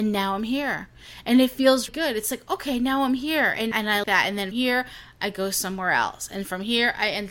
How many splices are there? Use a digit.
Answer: 4